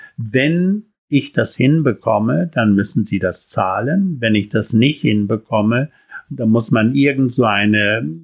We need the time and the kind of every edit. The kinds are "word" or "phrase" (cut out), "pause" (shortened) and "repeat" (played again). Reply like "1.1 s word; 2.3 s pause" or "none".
1.0 s pause